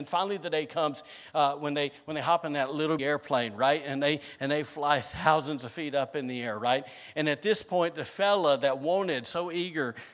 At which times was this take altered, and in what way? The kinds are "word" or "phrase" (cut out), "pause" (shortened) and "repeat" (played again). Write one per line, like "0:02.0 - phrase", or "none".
0:03.0 - word